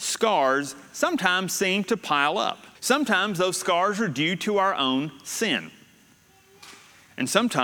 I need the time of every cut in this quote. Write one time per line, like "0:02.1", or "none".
0:02.7